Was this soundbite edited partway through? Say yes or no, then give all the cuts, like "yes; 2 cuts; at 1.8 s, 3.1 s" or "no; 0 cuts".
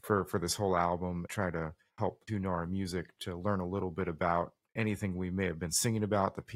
yes; 2 cuts; at 1.3 s, 2.3 s